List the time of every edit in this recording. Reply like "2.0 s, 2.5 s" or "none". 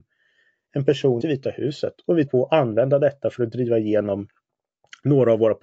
1.2 s, 2.3 s